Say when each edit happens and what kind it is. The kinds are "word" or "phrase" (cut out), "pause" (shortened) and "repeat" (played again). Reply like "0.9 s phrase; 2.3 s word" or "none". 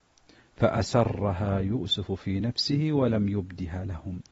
none

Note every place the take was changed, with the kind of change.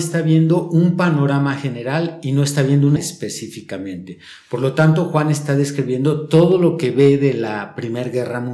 3.0 s word

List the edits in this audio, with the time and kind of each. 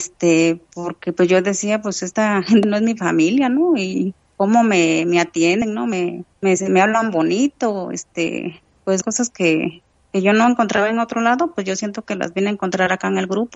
6.3 s pause; 9.0 s word; 9.9 s pause

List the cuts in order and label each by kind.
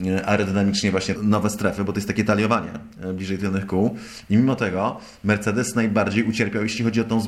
1.2 s word

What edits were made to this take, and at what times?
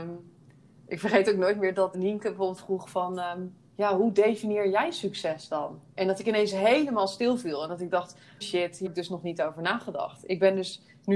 1.9 s word; 2.6 s phrase; 3.7 s pause; 5.9 s pause; 8.4 s word; 8.9 s word

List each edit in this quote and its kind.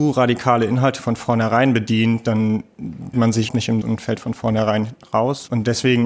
3.1 s word; 3.5 s word; 3.8 s word

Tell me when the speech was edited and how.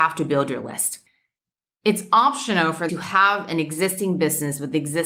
2.9 s word

